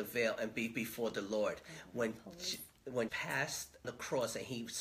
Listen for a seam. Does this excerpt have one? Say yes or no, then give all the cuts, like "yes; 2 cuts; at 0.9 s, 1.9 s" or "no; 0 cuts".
yes; 2 cuts; at 3.1 s, 3.8 s